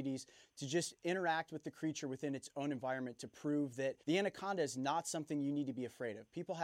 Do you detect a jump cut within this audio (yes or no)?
yes